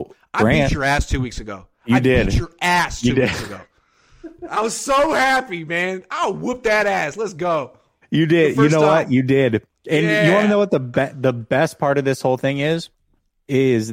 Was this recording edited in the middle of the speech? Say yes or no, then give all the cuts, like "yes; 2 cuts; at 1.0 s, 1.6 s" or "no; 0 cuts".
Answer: no; 0 cuts